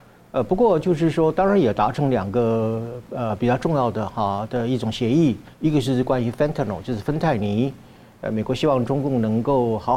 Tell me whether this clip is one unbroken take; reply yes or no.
no